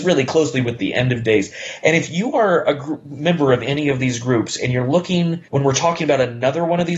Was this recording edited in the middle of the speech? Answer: yes; 1 cut; at 5.5 s

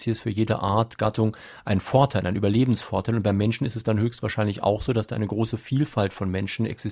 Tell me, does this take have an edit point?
no; 0 cuts

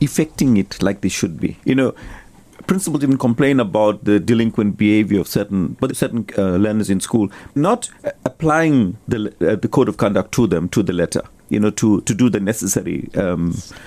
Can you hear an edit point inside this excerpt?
yes; 4 cuts; at 1.6 s, 5.9 s, 7.6 s, 9.0 s

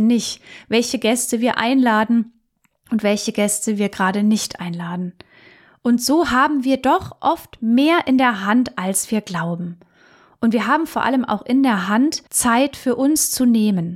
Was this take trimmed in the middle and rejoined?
yes; 1 cut; at 12.3 s

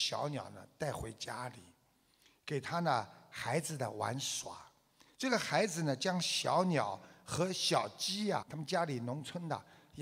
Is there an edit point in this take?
yes; 1 cut; at 8.4 s

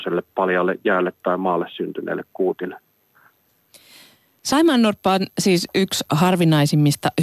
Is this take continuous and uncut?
yes; 0 cuts

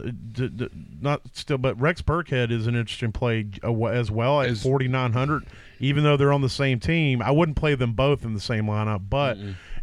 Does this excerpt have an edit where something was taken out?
no; 0 cuts

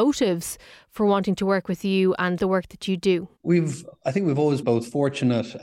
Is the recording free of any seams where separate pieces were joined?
no; 3 cuts; at 2.4 s, 3.4 s, 4.6 s

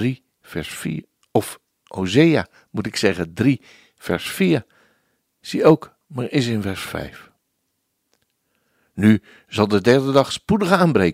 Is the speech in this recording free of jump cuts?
yes; 0 cuts

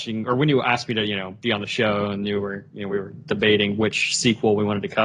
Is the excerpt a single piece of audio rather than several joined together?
yes; 0 cuts

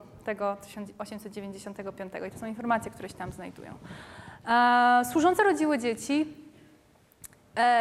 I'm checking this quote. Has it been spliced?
no; 0 cuts

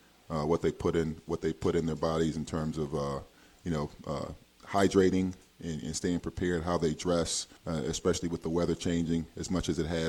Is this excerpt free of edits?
no; 1 cut; at 7.6 s

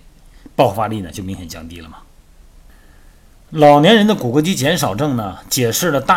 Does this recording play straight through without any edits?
yes; 0 cuts

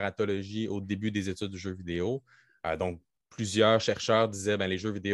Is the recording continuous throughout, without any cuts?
yes; 0 cuts

